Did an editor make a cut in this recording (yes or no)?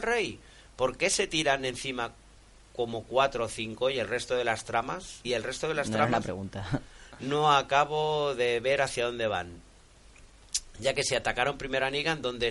yes